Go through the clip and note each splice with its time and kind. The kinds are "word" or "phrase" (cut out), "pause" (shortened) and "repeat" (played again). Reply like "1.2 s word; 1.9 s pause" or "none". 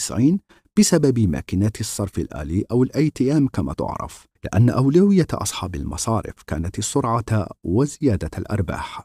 4.4 s pause